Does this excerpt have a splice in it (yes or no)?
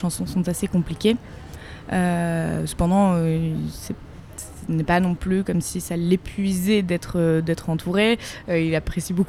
no